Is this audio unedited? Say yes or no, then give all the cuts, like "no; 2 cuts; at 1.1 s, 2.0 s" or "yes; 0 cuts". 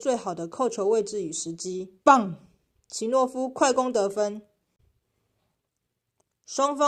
no; 1 cut; at 2.0 s